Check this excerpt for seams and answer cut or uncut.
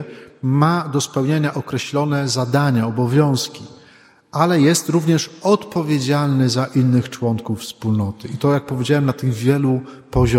uncut